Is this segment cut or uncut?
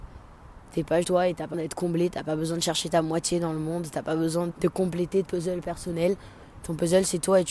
cut